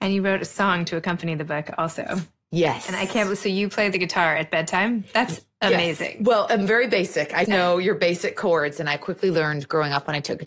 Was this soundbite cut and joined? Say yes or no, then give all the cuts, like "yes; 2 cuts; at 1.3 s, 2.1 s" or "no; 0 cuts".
yes; 1 cut; at 7.4 s